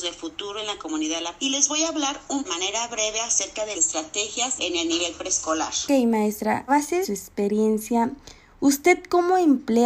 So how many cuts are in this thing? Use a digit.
6